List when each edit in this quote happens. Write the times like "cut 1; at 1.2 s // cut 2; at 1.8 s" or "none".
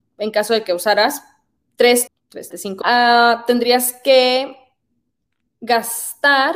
cut 1; at 2.1 s // cut 2; at 2.5 s // cut 3; at 2.8 s